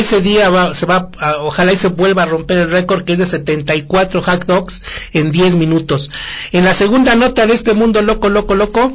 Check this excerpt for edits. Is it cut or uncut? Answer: uncut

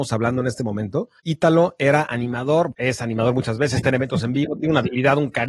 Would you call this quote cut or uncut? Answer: cut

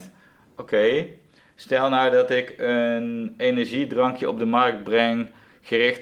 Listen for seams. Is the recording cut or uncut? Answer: uncut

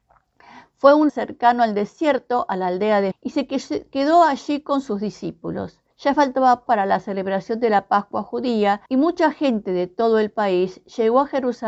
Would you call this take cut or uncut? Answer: cut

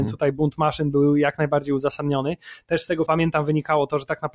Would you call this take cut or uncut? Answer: cut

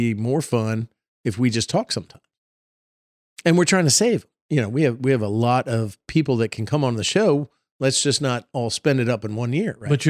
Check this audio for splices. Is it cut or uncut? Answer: uncut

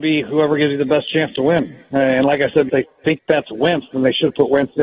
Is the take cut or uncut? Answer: cut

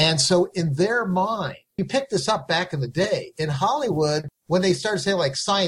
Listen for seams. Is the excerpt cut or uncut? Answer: cut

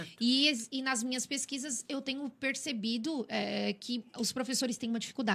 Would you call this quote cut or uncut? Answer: cut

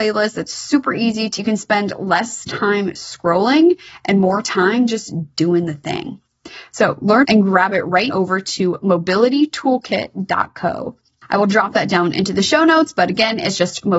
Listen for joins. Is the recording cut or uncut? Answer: cut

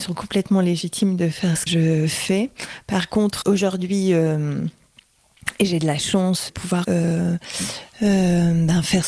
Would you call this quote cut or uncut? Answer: cut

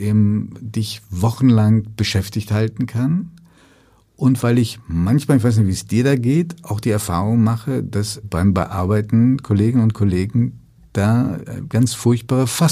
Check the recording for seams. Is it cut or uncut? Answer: cut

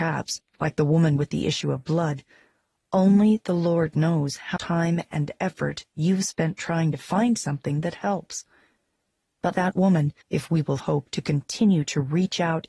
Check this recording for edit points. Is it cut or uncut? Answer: cut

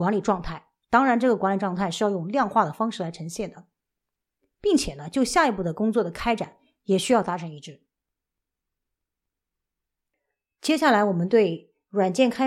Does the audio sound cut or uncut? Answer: uncut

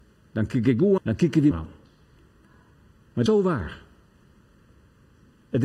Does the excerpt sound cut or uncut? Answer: cut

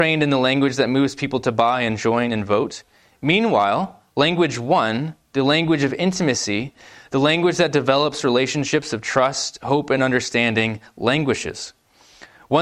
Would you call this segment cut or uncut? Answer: uncut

